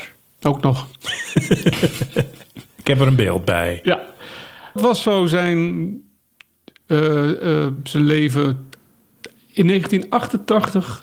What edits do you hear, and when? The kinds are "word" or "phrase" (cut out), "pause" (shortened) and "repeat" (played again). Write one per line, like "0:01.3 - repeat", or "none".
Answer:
0:04.8 - word